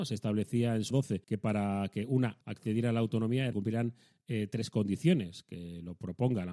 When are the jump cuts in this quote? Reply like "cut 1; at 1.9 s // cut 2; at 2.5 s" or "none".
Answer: cut 1; at 0.9 s // cut 2; at 1.2 s // cut 3; at 2.4 s // cut 4; at 3.5 s